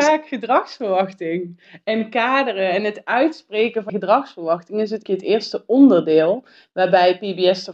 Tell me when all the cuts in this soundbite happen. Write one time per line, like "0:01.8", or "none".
0:03.9
0:05.1